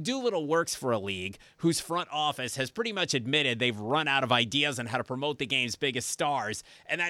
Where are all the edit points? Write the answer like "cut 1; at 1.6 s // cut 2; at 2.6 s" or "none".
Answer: none